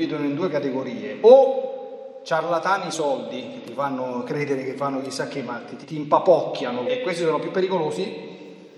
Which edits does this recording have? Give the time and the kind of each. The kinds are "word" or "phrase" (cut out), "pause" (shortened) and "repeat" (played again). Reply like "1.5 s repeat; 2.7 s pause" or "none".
2.9 s word; 5.8 s word; 6.9 s phrase